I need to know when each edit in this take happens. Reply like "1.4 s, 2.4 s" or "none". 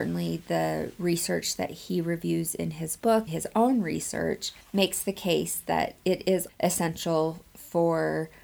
3.3 s, 4.6 s, 6.5 s